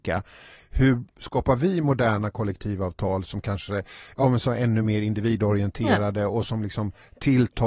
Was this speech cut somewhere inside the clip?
no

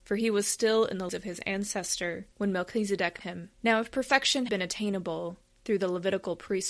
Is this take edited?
yes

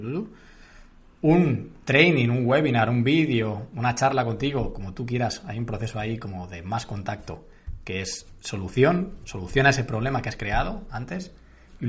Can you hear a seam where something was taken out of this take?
no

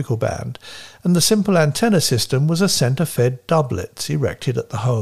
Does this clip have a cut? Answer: no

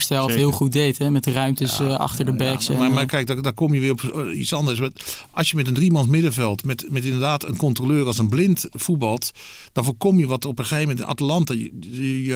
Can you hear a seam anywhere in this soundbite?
no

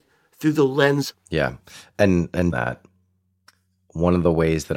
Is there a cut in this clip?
yes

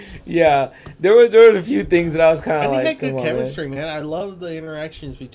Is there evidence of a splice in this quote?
no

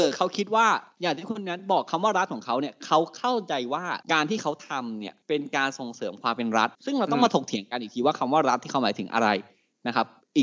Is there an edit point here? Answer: yes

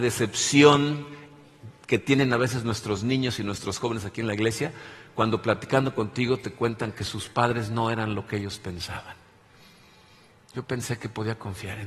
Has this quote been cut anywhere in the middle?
no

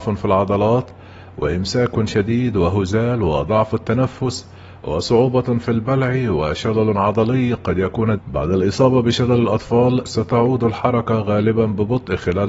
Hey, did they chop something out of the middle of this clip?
yes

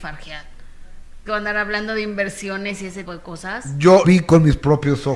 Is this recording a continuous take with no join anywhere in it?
no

